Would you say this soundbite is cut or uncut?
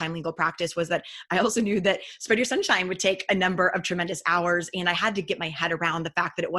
uncut